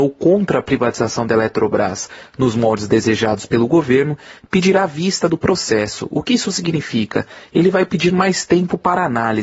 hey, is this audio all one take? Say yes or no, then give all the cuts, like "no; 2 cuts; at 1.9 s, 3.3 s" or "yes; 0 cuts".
yes; 0 cuts